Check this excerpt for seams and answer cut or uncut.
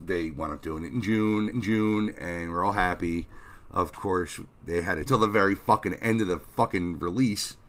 cut